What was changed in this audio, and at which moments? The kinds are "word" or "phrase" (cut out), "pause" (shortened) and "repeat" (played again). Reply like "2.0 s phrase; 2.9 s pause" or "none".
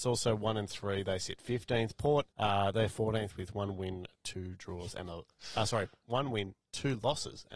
2.3 s pause